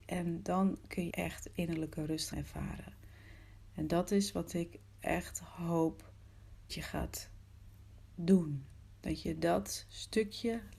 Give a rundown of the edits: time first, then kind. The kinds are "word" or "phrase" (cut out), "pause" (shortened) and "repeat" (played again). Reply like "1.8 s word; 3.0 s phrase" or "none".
1.1 s word; 2.3 s word; 6.7 s word